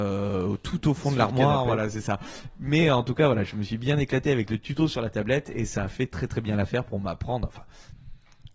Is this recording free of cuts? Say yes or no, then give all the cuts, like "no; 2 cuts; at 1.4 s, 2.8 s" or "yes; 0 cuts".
yes; 0 cuts